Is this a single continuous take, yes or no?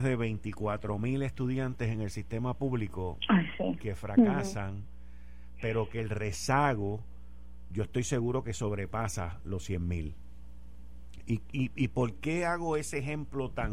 yes